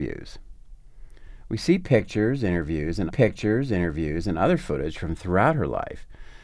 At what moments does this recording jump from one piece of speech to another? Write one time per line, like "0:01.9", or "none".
0:03.1